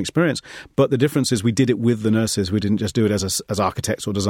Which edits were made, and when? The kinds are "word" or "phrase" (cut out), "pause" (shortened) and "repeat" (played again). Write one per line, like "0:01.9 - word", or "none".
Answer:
none

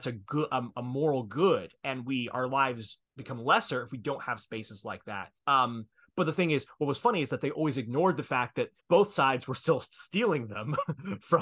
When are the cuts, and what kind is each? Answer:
0:03.1 - pause
0:05.4 - pause
0:08.8 - pause

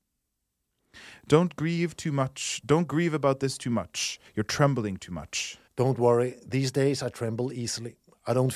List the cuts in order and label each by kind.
0:04.3 - pause
0:05.7 - pause

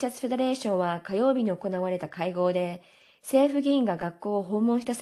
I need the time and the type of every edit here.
none

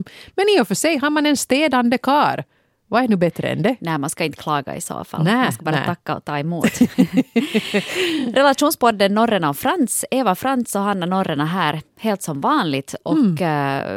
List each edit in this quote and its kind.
none

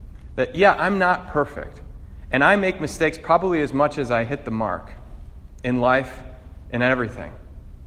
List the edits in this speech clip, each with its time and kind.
none

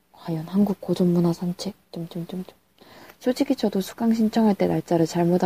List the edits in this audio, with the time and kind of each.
0:01.8 - pause

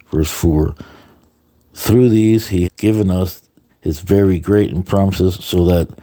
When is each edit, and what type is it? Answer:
0:02.6 - word
0:03.7 - pause
0:04.8 - word

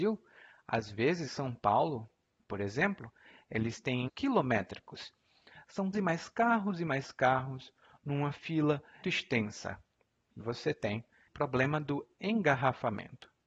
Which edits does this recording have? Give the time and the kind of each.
0:01.3 - word
0:04.1 - word
0:05.9 - word
0:09.0 - word
0:10.4 - word
0:11.3 - word

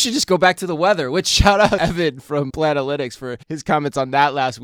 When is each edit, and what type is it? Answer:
0:01.8 - word
0:02.5 - word
0:03.4 - pause

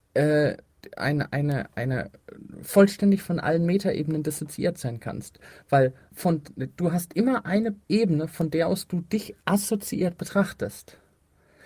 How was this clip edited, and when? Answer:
0:06.1 - pause
0:07.8 - pause
0:09.4 - pause

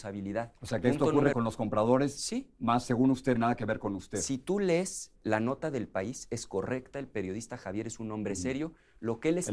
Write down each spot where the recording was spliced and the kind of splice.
0:01.3 - word
0:03.4 - phrase
0:05.2 - pause

